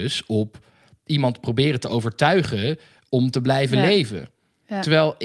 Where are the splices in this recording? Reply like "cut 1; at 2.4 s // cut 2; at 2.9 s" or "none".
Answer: none